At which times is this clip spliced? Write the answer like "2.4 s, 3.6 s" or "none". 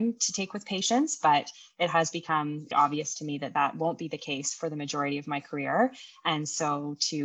2.7 s